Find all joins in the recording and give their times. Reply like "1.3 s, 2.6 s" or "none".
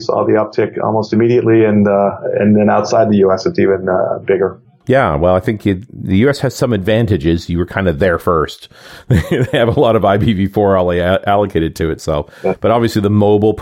none